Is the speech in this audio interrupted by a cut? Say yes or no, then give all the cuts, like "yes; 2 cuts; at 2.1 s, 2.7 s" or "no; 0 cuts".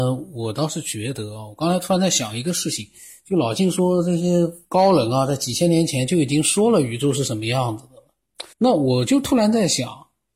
yes; 2 cuts; at 4.6 s, 8.5 s